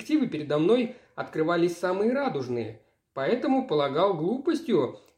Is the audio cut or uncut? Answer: uncut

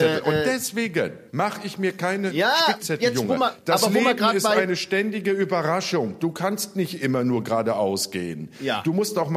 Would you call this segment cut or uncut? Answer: cut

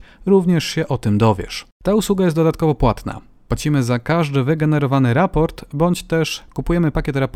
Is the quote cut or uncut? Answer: cut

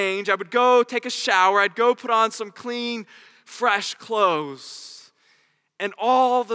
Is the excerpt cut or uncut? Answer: uncut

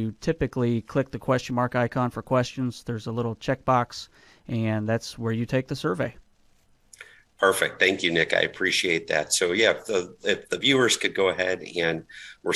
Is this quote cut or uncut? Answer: uncut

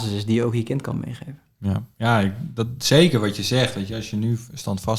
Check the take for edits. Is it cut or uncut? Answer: uncut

